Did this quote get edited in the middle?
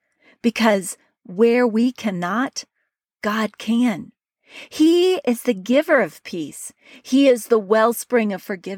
no; 0 cuts

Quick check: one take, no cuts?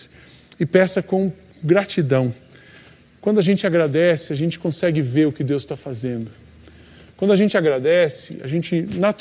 yes; 0 cuts

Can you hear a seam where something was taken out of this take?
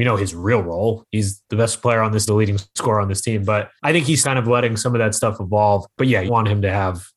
yes; 3 cuts; at 2.3 s, 4.2 s, 6.3 s

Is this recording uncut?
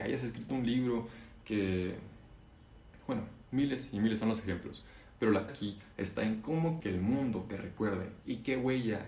no; 2 cuts; at 5.5 s, 6.8 s

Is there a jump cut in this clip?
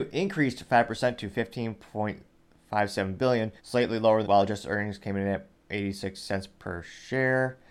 yes; 2 cuts; at 3.6 s, 4.2 s

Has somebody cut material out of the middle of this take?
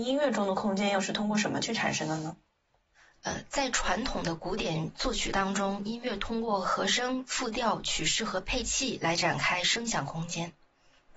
no; 0 cuts

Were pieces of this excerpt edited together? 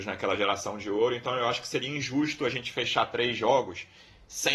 no; 0 cuts

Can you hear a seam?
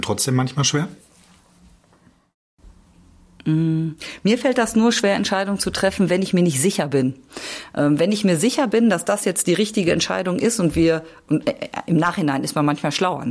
no; 0 cuts

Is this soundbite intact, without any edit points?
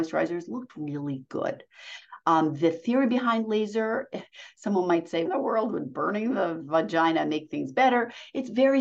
no; 1 cut; at 5.3 s

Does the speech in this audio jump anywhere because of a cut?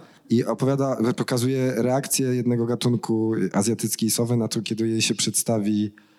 no; 0 cuts

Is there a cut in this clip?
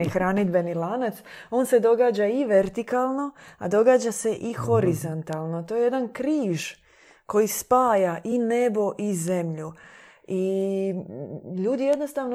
no; 0 cuts

